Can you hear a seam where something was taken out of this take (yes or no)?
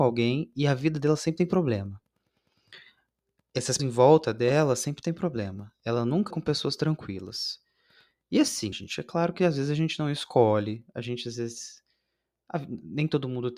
yes